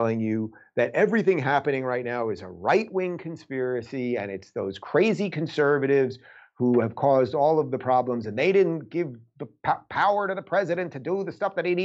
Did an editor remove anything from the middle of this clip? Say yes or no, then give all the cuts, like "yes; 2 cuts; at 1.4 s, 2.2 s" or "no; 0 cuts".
no; 0 cuts